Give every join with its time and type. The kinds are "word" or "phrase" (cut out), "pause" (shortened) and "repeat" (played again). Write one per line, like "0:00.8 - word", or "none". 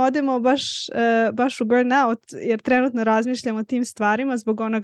none